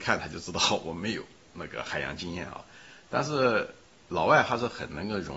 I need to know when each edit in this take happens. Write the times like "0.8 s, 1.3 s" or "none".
none